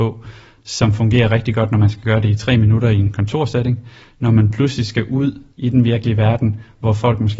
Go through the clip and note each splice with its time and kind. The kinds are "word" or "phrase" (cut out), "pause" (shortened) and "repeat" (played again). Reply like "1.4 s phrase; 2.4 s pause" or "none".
5.5 s pause